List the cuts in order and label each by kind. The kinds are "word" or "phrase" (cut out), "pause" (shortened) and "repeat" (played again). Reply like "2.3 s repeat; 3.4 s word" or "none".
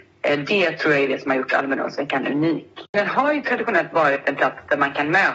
none